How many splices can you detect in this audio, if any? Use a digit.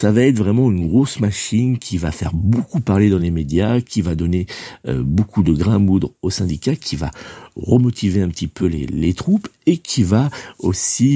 0